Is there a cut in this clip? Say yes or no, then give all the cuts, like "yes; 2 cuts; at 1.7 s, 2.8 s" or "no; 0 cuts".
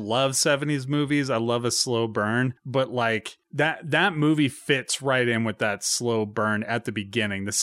no; 0 cuts